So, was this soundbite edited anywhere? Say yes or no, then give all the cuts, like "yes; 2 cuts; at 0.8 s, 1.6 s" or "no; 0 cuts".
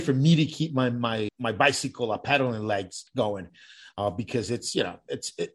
yes; 2 cuts; at 1.3 s, 3.1 s